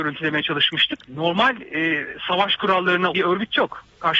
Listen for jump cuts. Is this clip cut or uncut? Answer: cut